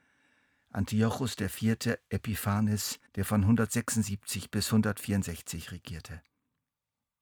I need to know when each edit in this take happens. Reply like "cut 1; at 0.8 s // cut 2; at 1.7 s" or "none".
cut 1; at 3.1 s

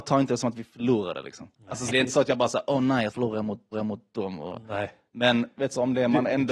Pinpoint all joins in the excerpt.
cut 1; at 1.9 s // cut 2; at 3.1 s // cut 3; at 3.7 s

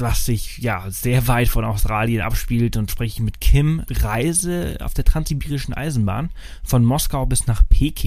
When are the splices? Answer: cut 1; at 2.9 s // cut 2; at 3.9 s

